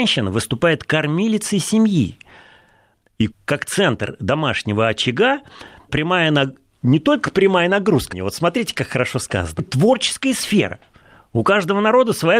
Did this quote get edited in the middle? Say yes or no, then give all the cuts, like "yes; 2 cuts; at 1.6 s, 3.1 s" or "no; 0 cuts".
yes; 4 cuts; at 3.3 s, 5.9 s, 8.1 s, 9.6 s